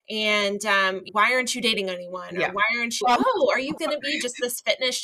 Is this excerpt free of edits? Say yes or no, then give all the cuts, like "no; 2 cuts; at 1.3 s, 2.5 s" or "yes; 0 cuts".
no; 3 cuts; at 1.1 s, 3.0 s, 3.8 s